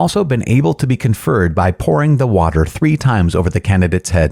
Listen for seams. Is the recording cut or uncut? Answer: uncut